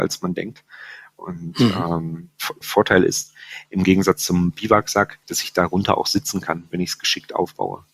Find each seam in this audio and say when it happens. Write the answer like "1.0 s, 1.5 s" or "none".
2.6 s, 5.2 s